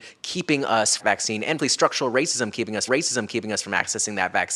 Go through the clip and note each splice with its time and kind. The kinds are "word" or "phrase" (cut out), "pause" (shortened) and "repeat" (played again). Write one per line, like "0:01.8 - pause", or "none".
0:01.0 - phrase
0:01.6 - word
0:02.9 - repeat

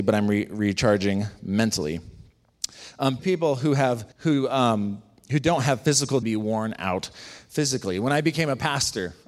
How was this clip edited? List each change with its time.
0:03.2 - word
0:04.1 - pause
0:06.2 - phrase

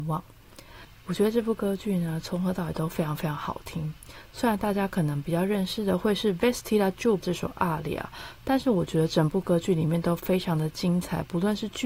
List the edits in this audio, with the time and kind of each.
0:07.2 - word

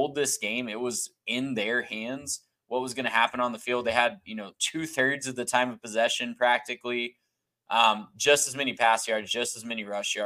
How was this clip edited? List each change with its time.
none

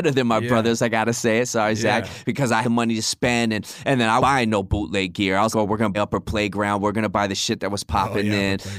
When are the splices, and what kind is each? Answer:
0:02.6 - word
0:04.2 - word
0:05.5 - word
0:05.9 - word

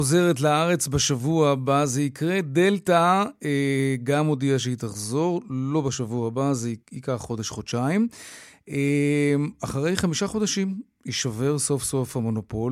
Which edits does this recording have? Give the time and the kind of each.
0:06.8 - pause

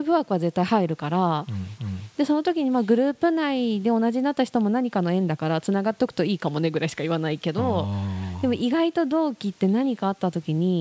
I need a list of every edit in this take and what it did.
0:01.8 - repeat

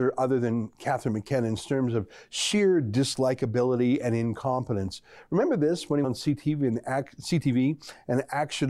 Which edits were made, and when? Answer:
0:06.0 - word

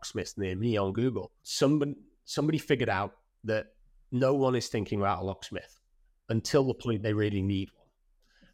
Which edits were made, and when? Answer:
0:01.4 - pause
0:06.0 - pause

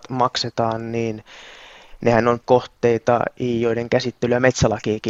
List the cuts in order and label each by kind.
0:02.4 - word

